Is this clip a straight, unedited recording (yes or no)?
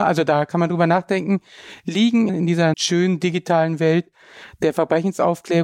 no